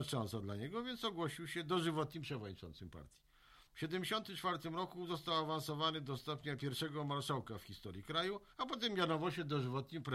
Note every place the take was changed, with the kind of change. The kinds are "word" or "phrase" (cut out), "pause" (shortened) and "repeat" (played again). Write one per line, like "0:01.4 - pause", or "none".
0:03.7 - pause
0:08.5 - pause